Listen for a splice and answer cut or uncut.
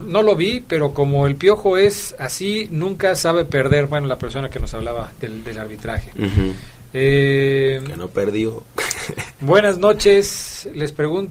uncut